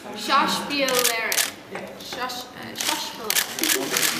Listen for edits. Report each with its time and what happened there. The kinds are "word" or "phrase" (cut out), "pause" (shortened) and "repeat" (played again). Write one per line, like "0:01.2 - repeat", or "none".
none